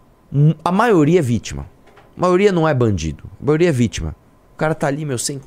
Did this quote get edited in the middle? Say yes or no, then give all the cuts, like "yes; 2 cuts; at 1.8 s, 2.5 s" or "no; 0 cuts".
no; 0 cuts